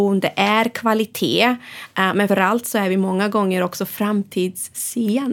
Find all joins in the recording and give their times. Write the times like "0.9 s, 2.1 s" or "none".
2.3 s